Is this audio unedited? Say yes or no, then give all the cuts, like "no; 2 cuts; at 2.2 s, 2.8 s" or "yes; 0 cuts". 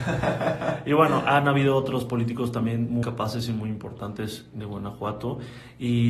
no; 2 cuts; at 3.0 s, 4.5 s